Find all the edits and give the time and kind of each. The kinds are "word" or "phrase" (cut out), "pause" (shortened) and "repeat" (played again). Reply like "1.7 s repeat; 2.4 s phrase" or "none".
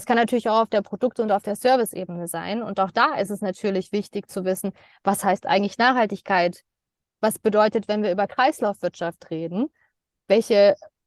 none

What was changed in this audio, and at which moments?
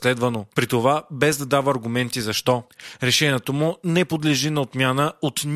none

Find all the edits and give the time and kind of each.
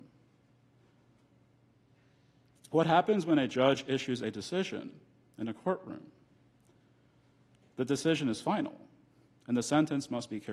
none

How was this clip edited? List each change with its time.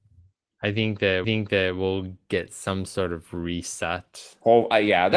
1.2 s repeat

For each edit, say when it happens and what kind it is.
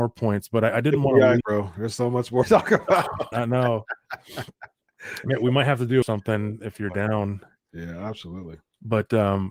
1.4 s word; 2.4 s word; 3.3 s word; 6.0 s phrase

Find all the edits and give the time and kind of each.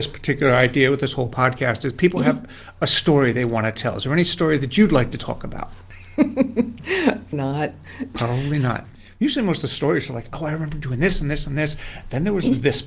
7.3 s word

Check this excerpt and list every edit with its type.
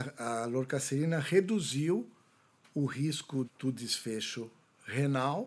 3.4 s word

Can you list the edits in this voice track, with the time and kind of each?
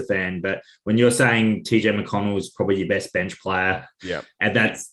none

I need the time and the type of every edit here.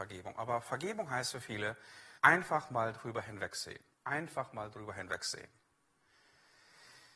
2.2 s pause; 3.9 s pause

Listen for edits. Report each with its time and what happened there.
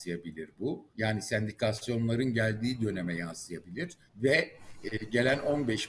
0.9 s pause; 4.1 s pause

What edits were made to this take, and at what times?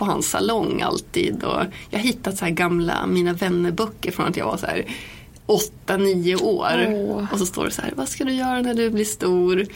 none

